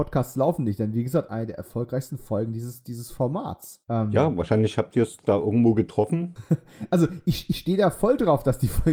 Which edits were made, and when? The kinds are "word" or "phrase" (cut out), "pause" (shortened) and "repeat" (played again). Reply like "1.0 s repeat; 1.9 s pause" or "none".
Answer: none